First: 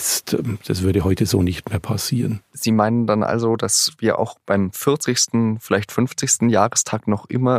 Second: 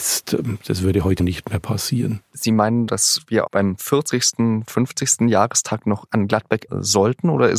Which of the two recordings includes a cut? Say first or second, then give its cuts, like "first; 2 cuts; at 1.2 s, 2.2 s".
second; 6 cuts; at 1.2 s, 2.9 s, 3.5 s, 4.6 s, 6.1 s, 6.7 s